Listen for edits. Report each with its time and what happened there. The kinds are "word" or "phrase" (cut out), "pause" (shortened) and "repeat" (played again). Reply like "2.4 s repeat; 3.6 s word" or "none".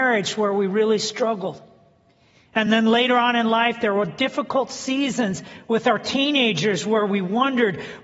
none